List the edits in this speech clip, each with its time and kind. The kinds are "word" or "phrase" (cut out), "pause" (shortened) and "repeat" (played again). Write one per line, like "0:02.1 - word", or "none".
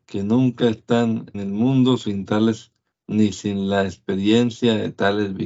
0:01.3 - word
0:02.9 - word